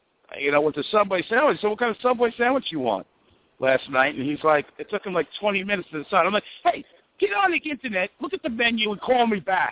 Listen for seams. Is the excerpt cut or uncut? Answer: uncut